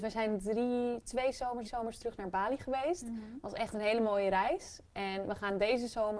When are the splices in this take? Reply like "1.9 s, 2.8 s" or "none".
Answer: 1.6 s